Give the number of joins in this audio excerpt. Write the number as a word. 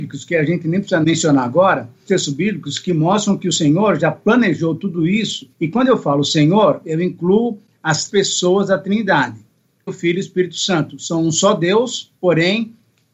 five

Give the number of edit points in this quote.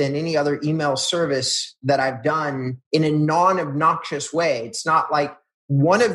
one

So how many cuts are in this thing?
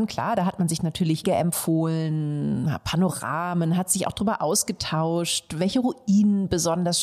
one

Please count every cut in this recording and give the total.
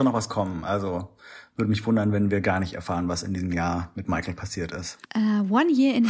one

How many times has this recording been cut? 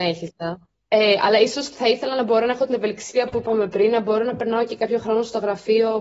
zero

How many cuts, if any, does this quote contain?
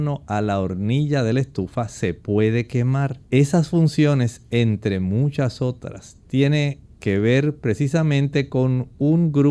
one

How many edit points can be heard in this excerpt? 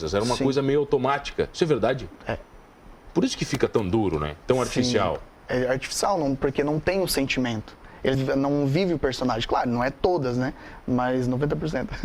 one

